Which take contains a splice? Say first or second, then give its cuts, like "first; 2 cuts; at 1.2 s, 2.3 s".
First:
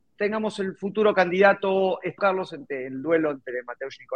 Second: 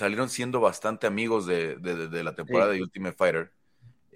first; 1 cut; at 2.2 s